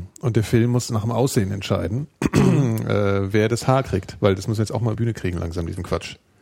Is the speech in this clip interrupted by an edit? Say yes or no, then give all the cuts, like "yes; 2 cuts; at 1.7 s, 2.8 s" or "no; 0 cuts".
yes; 1 cut; at 4.9 s